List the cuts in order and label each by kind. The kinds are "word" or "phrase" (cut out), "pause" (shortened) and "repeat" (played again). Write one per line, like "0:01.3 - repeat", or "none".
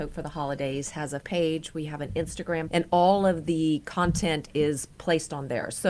0:01.2 - word
0:02.7 - word